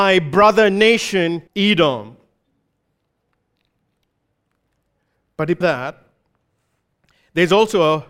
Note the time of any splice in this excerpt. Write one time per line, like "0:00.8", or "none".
0:01.5
0:05.6

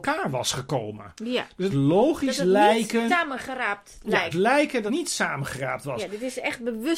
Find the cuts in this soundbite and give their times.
0:01.7
0:03.1
0:04.3
0:04.9

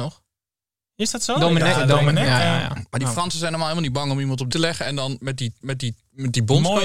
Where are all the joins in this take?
0:02.4
0:04.5
0:05.6

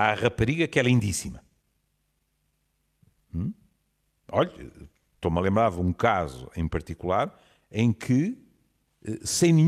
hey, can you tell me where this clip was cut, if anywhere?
none

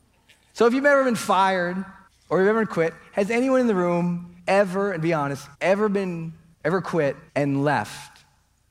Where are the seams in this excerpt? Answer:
0:02.1
0:04.4
0:05.5
0:06.5
0:07.3

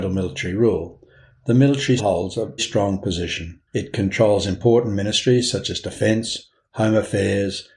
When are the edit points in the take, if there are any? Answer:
0:02.0
0:02.6
0:03.7

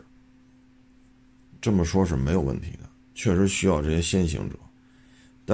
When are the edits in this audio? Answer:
none

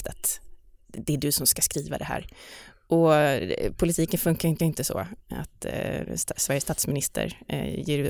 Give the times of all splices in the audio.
0:04.6

